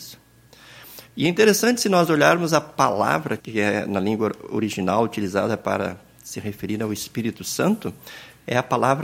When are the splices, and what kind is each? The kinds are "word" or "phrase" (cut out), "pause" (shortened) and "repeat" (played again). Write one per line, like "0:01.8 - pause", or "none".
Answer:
0:03.4 - word